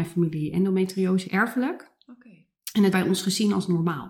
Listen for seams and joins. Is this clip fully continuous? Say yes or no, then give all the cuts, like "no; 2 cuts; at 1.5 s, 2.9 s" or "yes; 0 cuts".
no; 2 cuts; at 1.3 s, 2.9 s